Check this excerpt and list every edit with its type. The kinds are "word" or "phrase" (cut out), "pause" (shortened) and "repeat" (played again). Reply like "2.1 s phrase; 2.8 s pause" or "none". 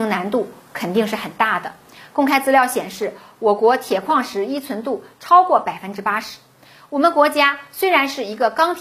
none